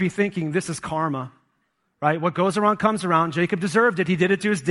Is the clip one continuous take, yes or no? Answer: yes